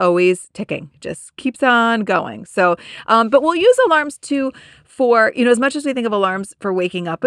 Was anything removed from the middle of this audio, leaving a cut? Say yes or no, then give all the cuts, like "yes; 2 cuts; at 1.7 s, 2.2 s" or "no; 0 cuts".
no; 0 cuts